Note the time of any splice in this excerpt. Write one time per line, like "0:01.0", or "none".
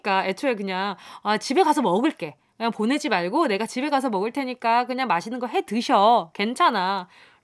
none

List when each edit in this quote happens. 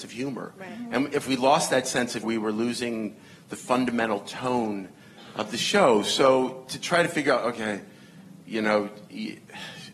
0:02.2

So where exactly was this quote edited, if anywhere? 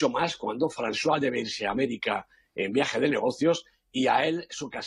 none

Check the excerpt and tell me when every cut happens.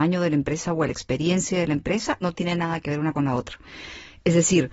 0:02.2
0:03.1

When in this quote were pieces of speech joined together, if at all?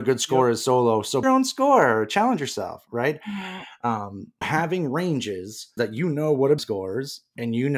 0:01.2
0:04.4
0:05.8
0:06.6

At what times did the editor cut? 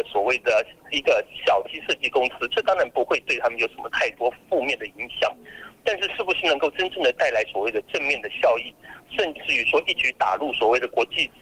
0:01.6

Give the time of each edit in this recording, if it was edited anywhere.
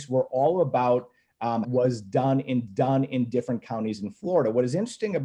0:01.6
0:02.7

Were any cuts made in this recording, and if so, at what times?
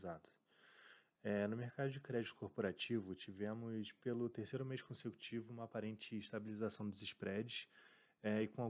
none

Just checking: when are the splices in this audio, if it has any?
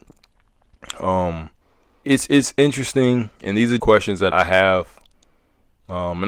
0:02.0
0:03.4
0:03.8
0:04.3

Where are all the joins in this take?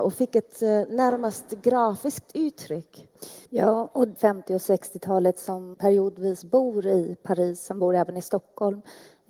0:03.4
0:04.2
0:05.7

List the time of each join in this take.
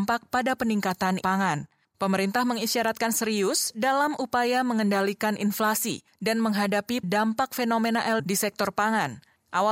0:01.2
0:07.0
0:08.2

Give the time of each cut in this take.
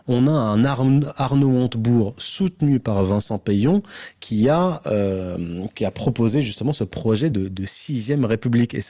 none

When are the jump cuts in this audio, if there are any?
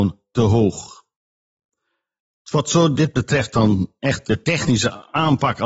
none

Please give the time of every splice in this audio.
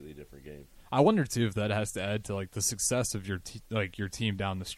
none

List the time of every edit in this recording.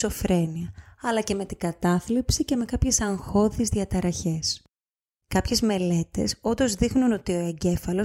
none

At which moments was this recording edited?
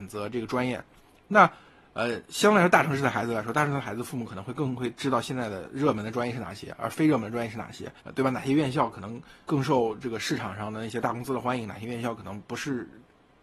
0:08.0
0:09.4

